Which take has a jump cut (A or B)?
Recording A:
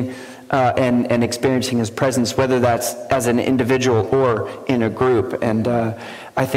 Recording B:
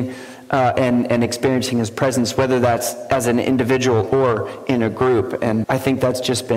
B